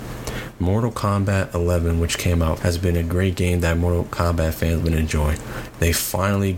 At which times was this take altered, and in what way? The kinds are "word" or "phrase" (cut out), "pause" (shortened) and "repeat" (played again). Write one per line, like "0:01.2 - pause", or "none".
0:02.6 - phrase
0:04.8 - word